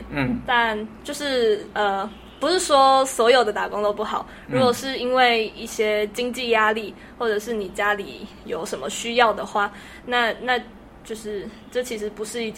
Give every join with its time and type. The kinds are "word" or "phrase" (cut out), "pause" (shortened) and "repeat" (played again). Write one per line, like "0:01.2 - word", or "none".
none

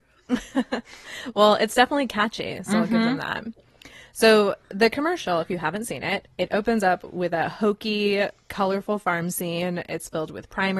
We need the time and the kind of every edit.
none

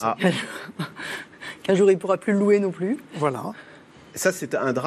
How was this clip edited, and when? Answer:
none

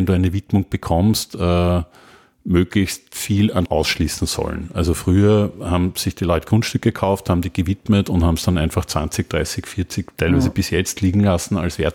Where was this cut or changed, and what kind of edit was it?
0:03.7 - word

